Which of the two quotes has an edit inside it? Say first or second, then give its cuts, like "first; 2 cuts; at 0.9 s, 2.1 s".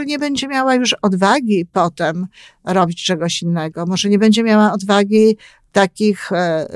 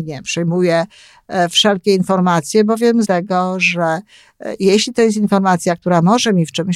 second; 1 cut; at 3.0 s